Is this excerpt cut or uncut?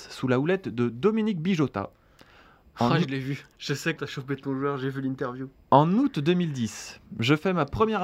cut